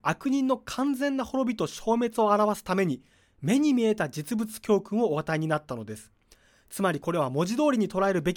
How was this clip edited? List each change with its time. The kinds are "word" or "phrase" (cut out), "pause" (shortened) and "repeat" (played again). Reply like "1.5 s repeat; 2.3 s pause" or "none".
none